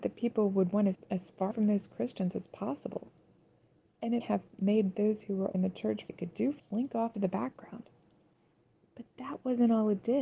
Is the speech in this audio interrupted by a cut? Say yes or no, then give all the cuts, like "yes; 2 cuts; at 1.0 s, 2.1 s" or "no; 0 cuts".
yes; 7 cuts; at 0.9 s, 1.5 s, 4.2 s, 5.5 s, 6.1 s, 6.6 s, 7.1 s